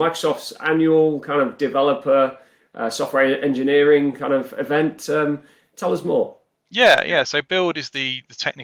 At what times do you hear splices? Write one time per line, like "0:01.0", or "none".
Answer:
none